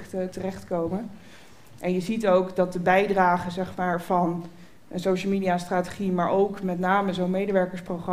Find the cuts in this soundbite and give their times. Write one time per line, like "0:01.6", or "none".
none